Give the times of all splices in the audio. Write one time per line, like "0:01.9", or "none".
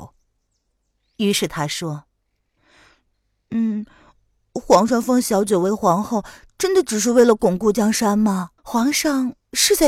0:08.6